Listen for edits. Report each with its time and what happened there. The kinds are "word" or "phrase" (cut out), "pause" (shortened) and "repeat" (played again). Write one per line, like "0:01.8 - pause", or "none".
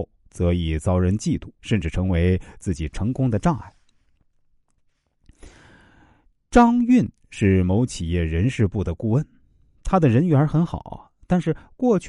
0:01.6 - pause